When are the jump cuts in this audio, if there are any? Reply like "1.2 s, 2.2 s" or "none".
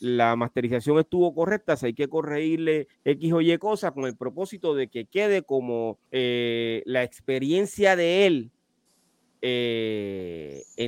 2.9 s, 6.0 s